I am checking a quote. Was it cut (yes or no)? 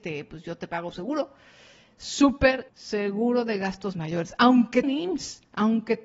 yes